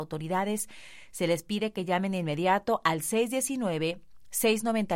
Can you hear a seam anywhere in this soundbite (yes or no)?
no